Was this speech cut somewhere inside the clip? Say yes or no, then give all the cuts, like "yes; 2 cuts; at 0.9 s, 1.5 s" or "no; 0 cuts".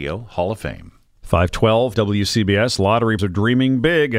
yes; 2 cuts; at 1.9 s, 3.2 s